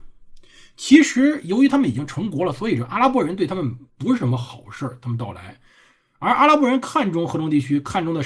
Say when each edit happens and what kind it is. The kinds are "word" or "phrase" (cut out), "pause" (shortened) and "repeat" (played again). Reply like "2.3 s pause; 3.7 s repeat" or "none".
3.9 s pause